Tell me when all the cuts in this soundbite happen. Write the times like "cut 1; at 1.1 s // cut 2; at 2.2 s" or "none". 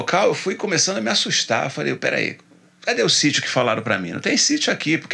none